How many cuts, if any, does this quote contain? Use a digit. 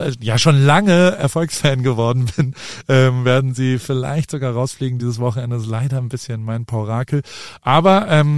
0